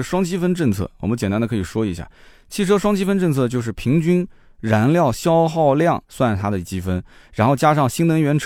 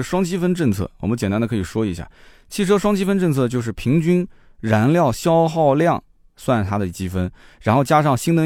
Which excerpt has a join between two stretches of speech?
first; 1 cut; at 6.0 s

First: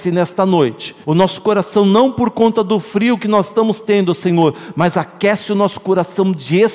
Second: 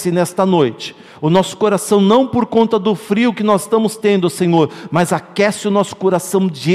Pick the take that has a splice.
first; 1 cut; at 1.0 s

